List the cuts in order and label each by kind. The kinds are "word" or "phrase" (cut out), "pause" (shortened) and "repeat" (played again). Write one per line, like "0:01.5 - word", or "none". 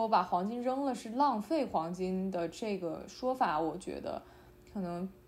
none

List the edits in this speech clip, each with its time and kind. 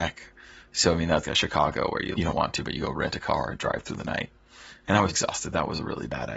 0:01.2 - word
0:02.1 - word
0:05.1 - word

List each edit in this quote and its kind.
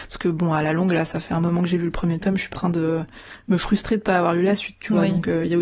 0:02.5 - word

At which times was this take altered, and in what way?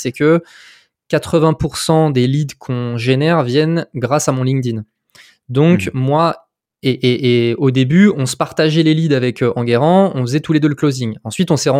none

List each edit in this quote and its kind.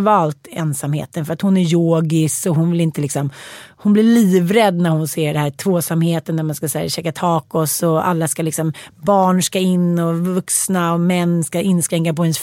none

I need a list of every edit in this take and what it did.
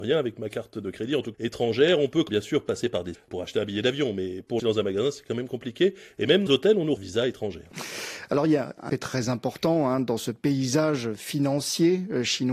0:01.3 - word
0:02.3 - word
0:03.1 - word
0:04.6 - phrase
0:06.5 - word
0:07.0 - phrase
0:08.9 - word

